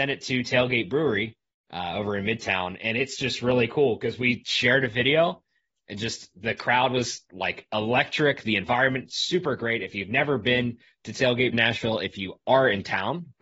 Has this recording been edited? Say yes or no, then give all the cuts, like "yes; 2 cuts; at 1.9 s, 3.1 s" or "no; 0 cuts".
yes; 1 cut; at 11.5 s